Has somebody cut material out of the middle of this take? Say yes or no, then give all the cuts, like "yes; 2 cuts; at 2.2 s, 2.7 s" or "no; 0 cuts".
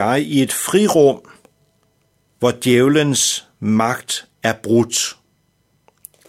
no; 0 cuts